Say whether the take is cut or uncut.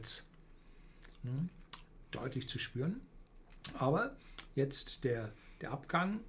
uncut